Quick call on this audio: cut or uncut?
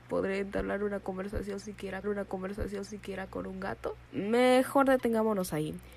cut